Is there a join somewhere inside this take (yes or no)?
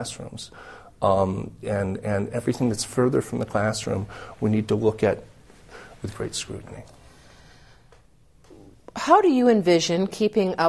no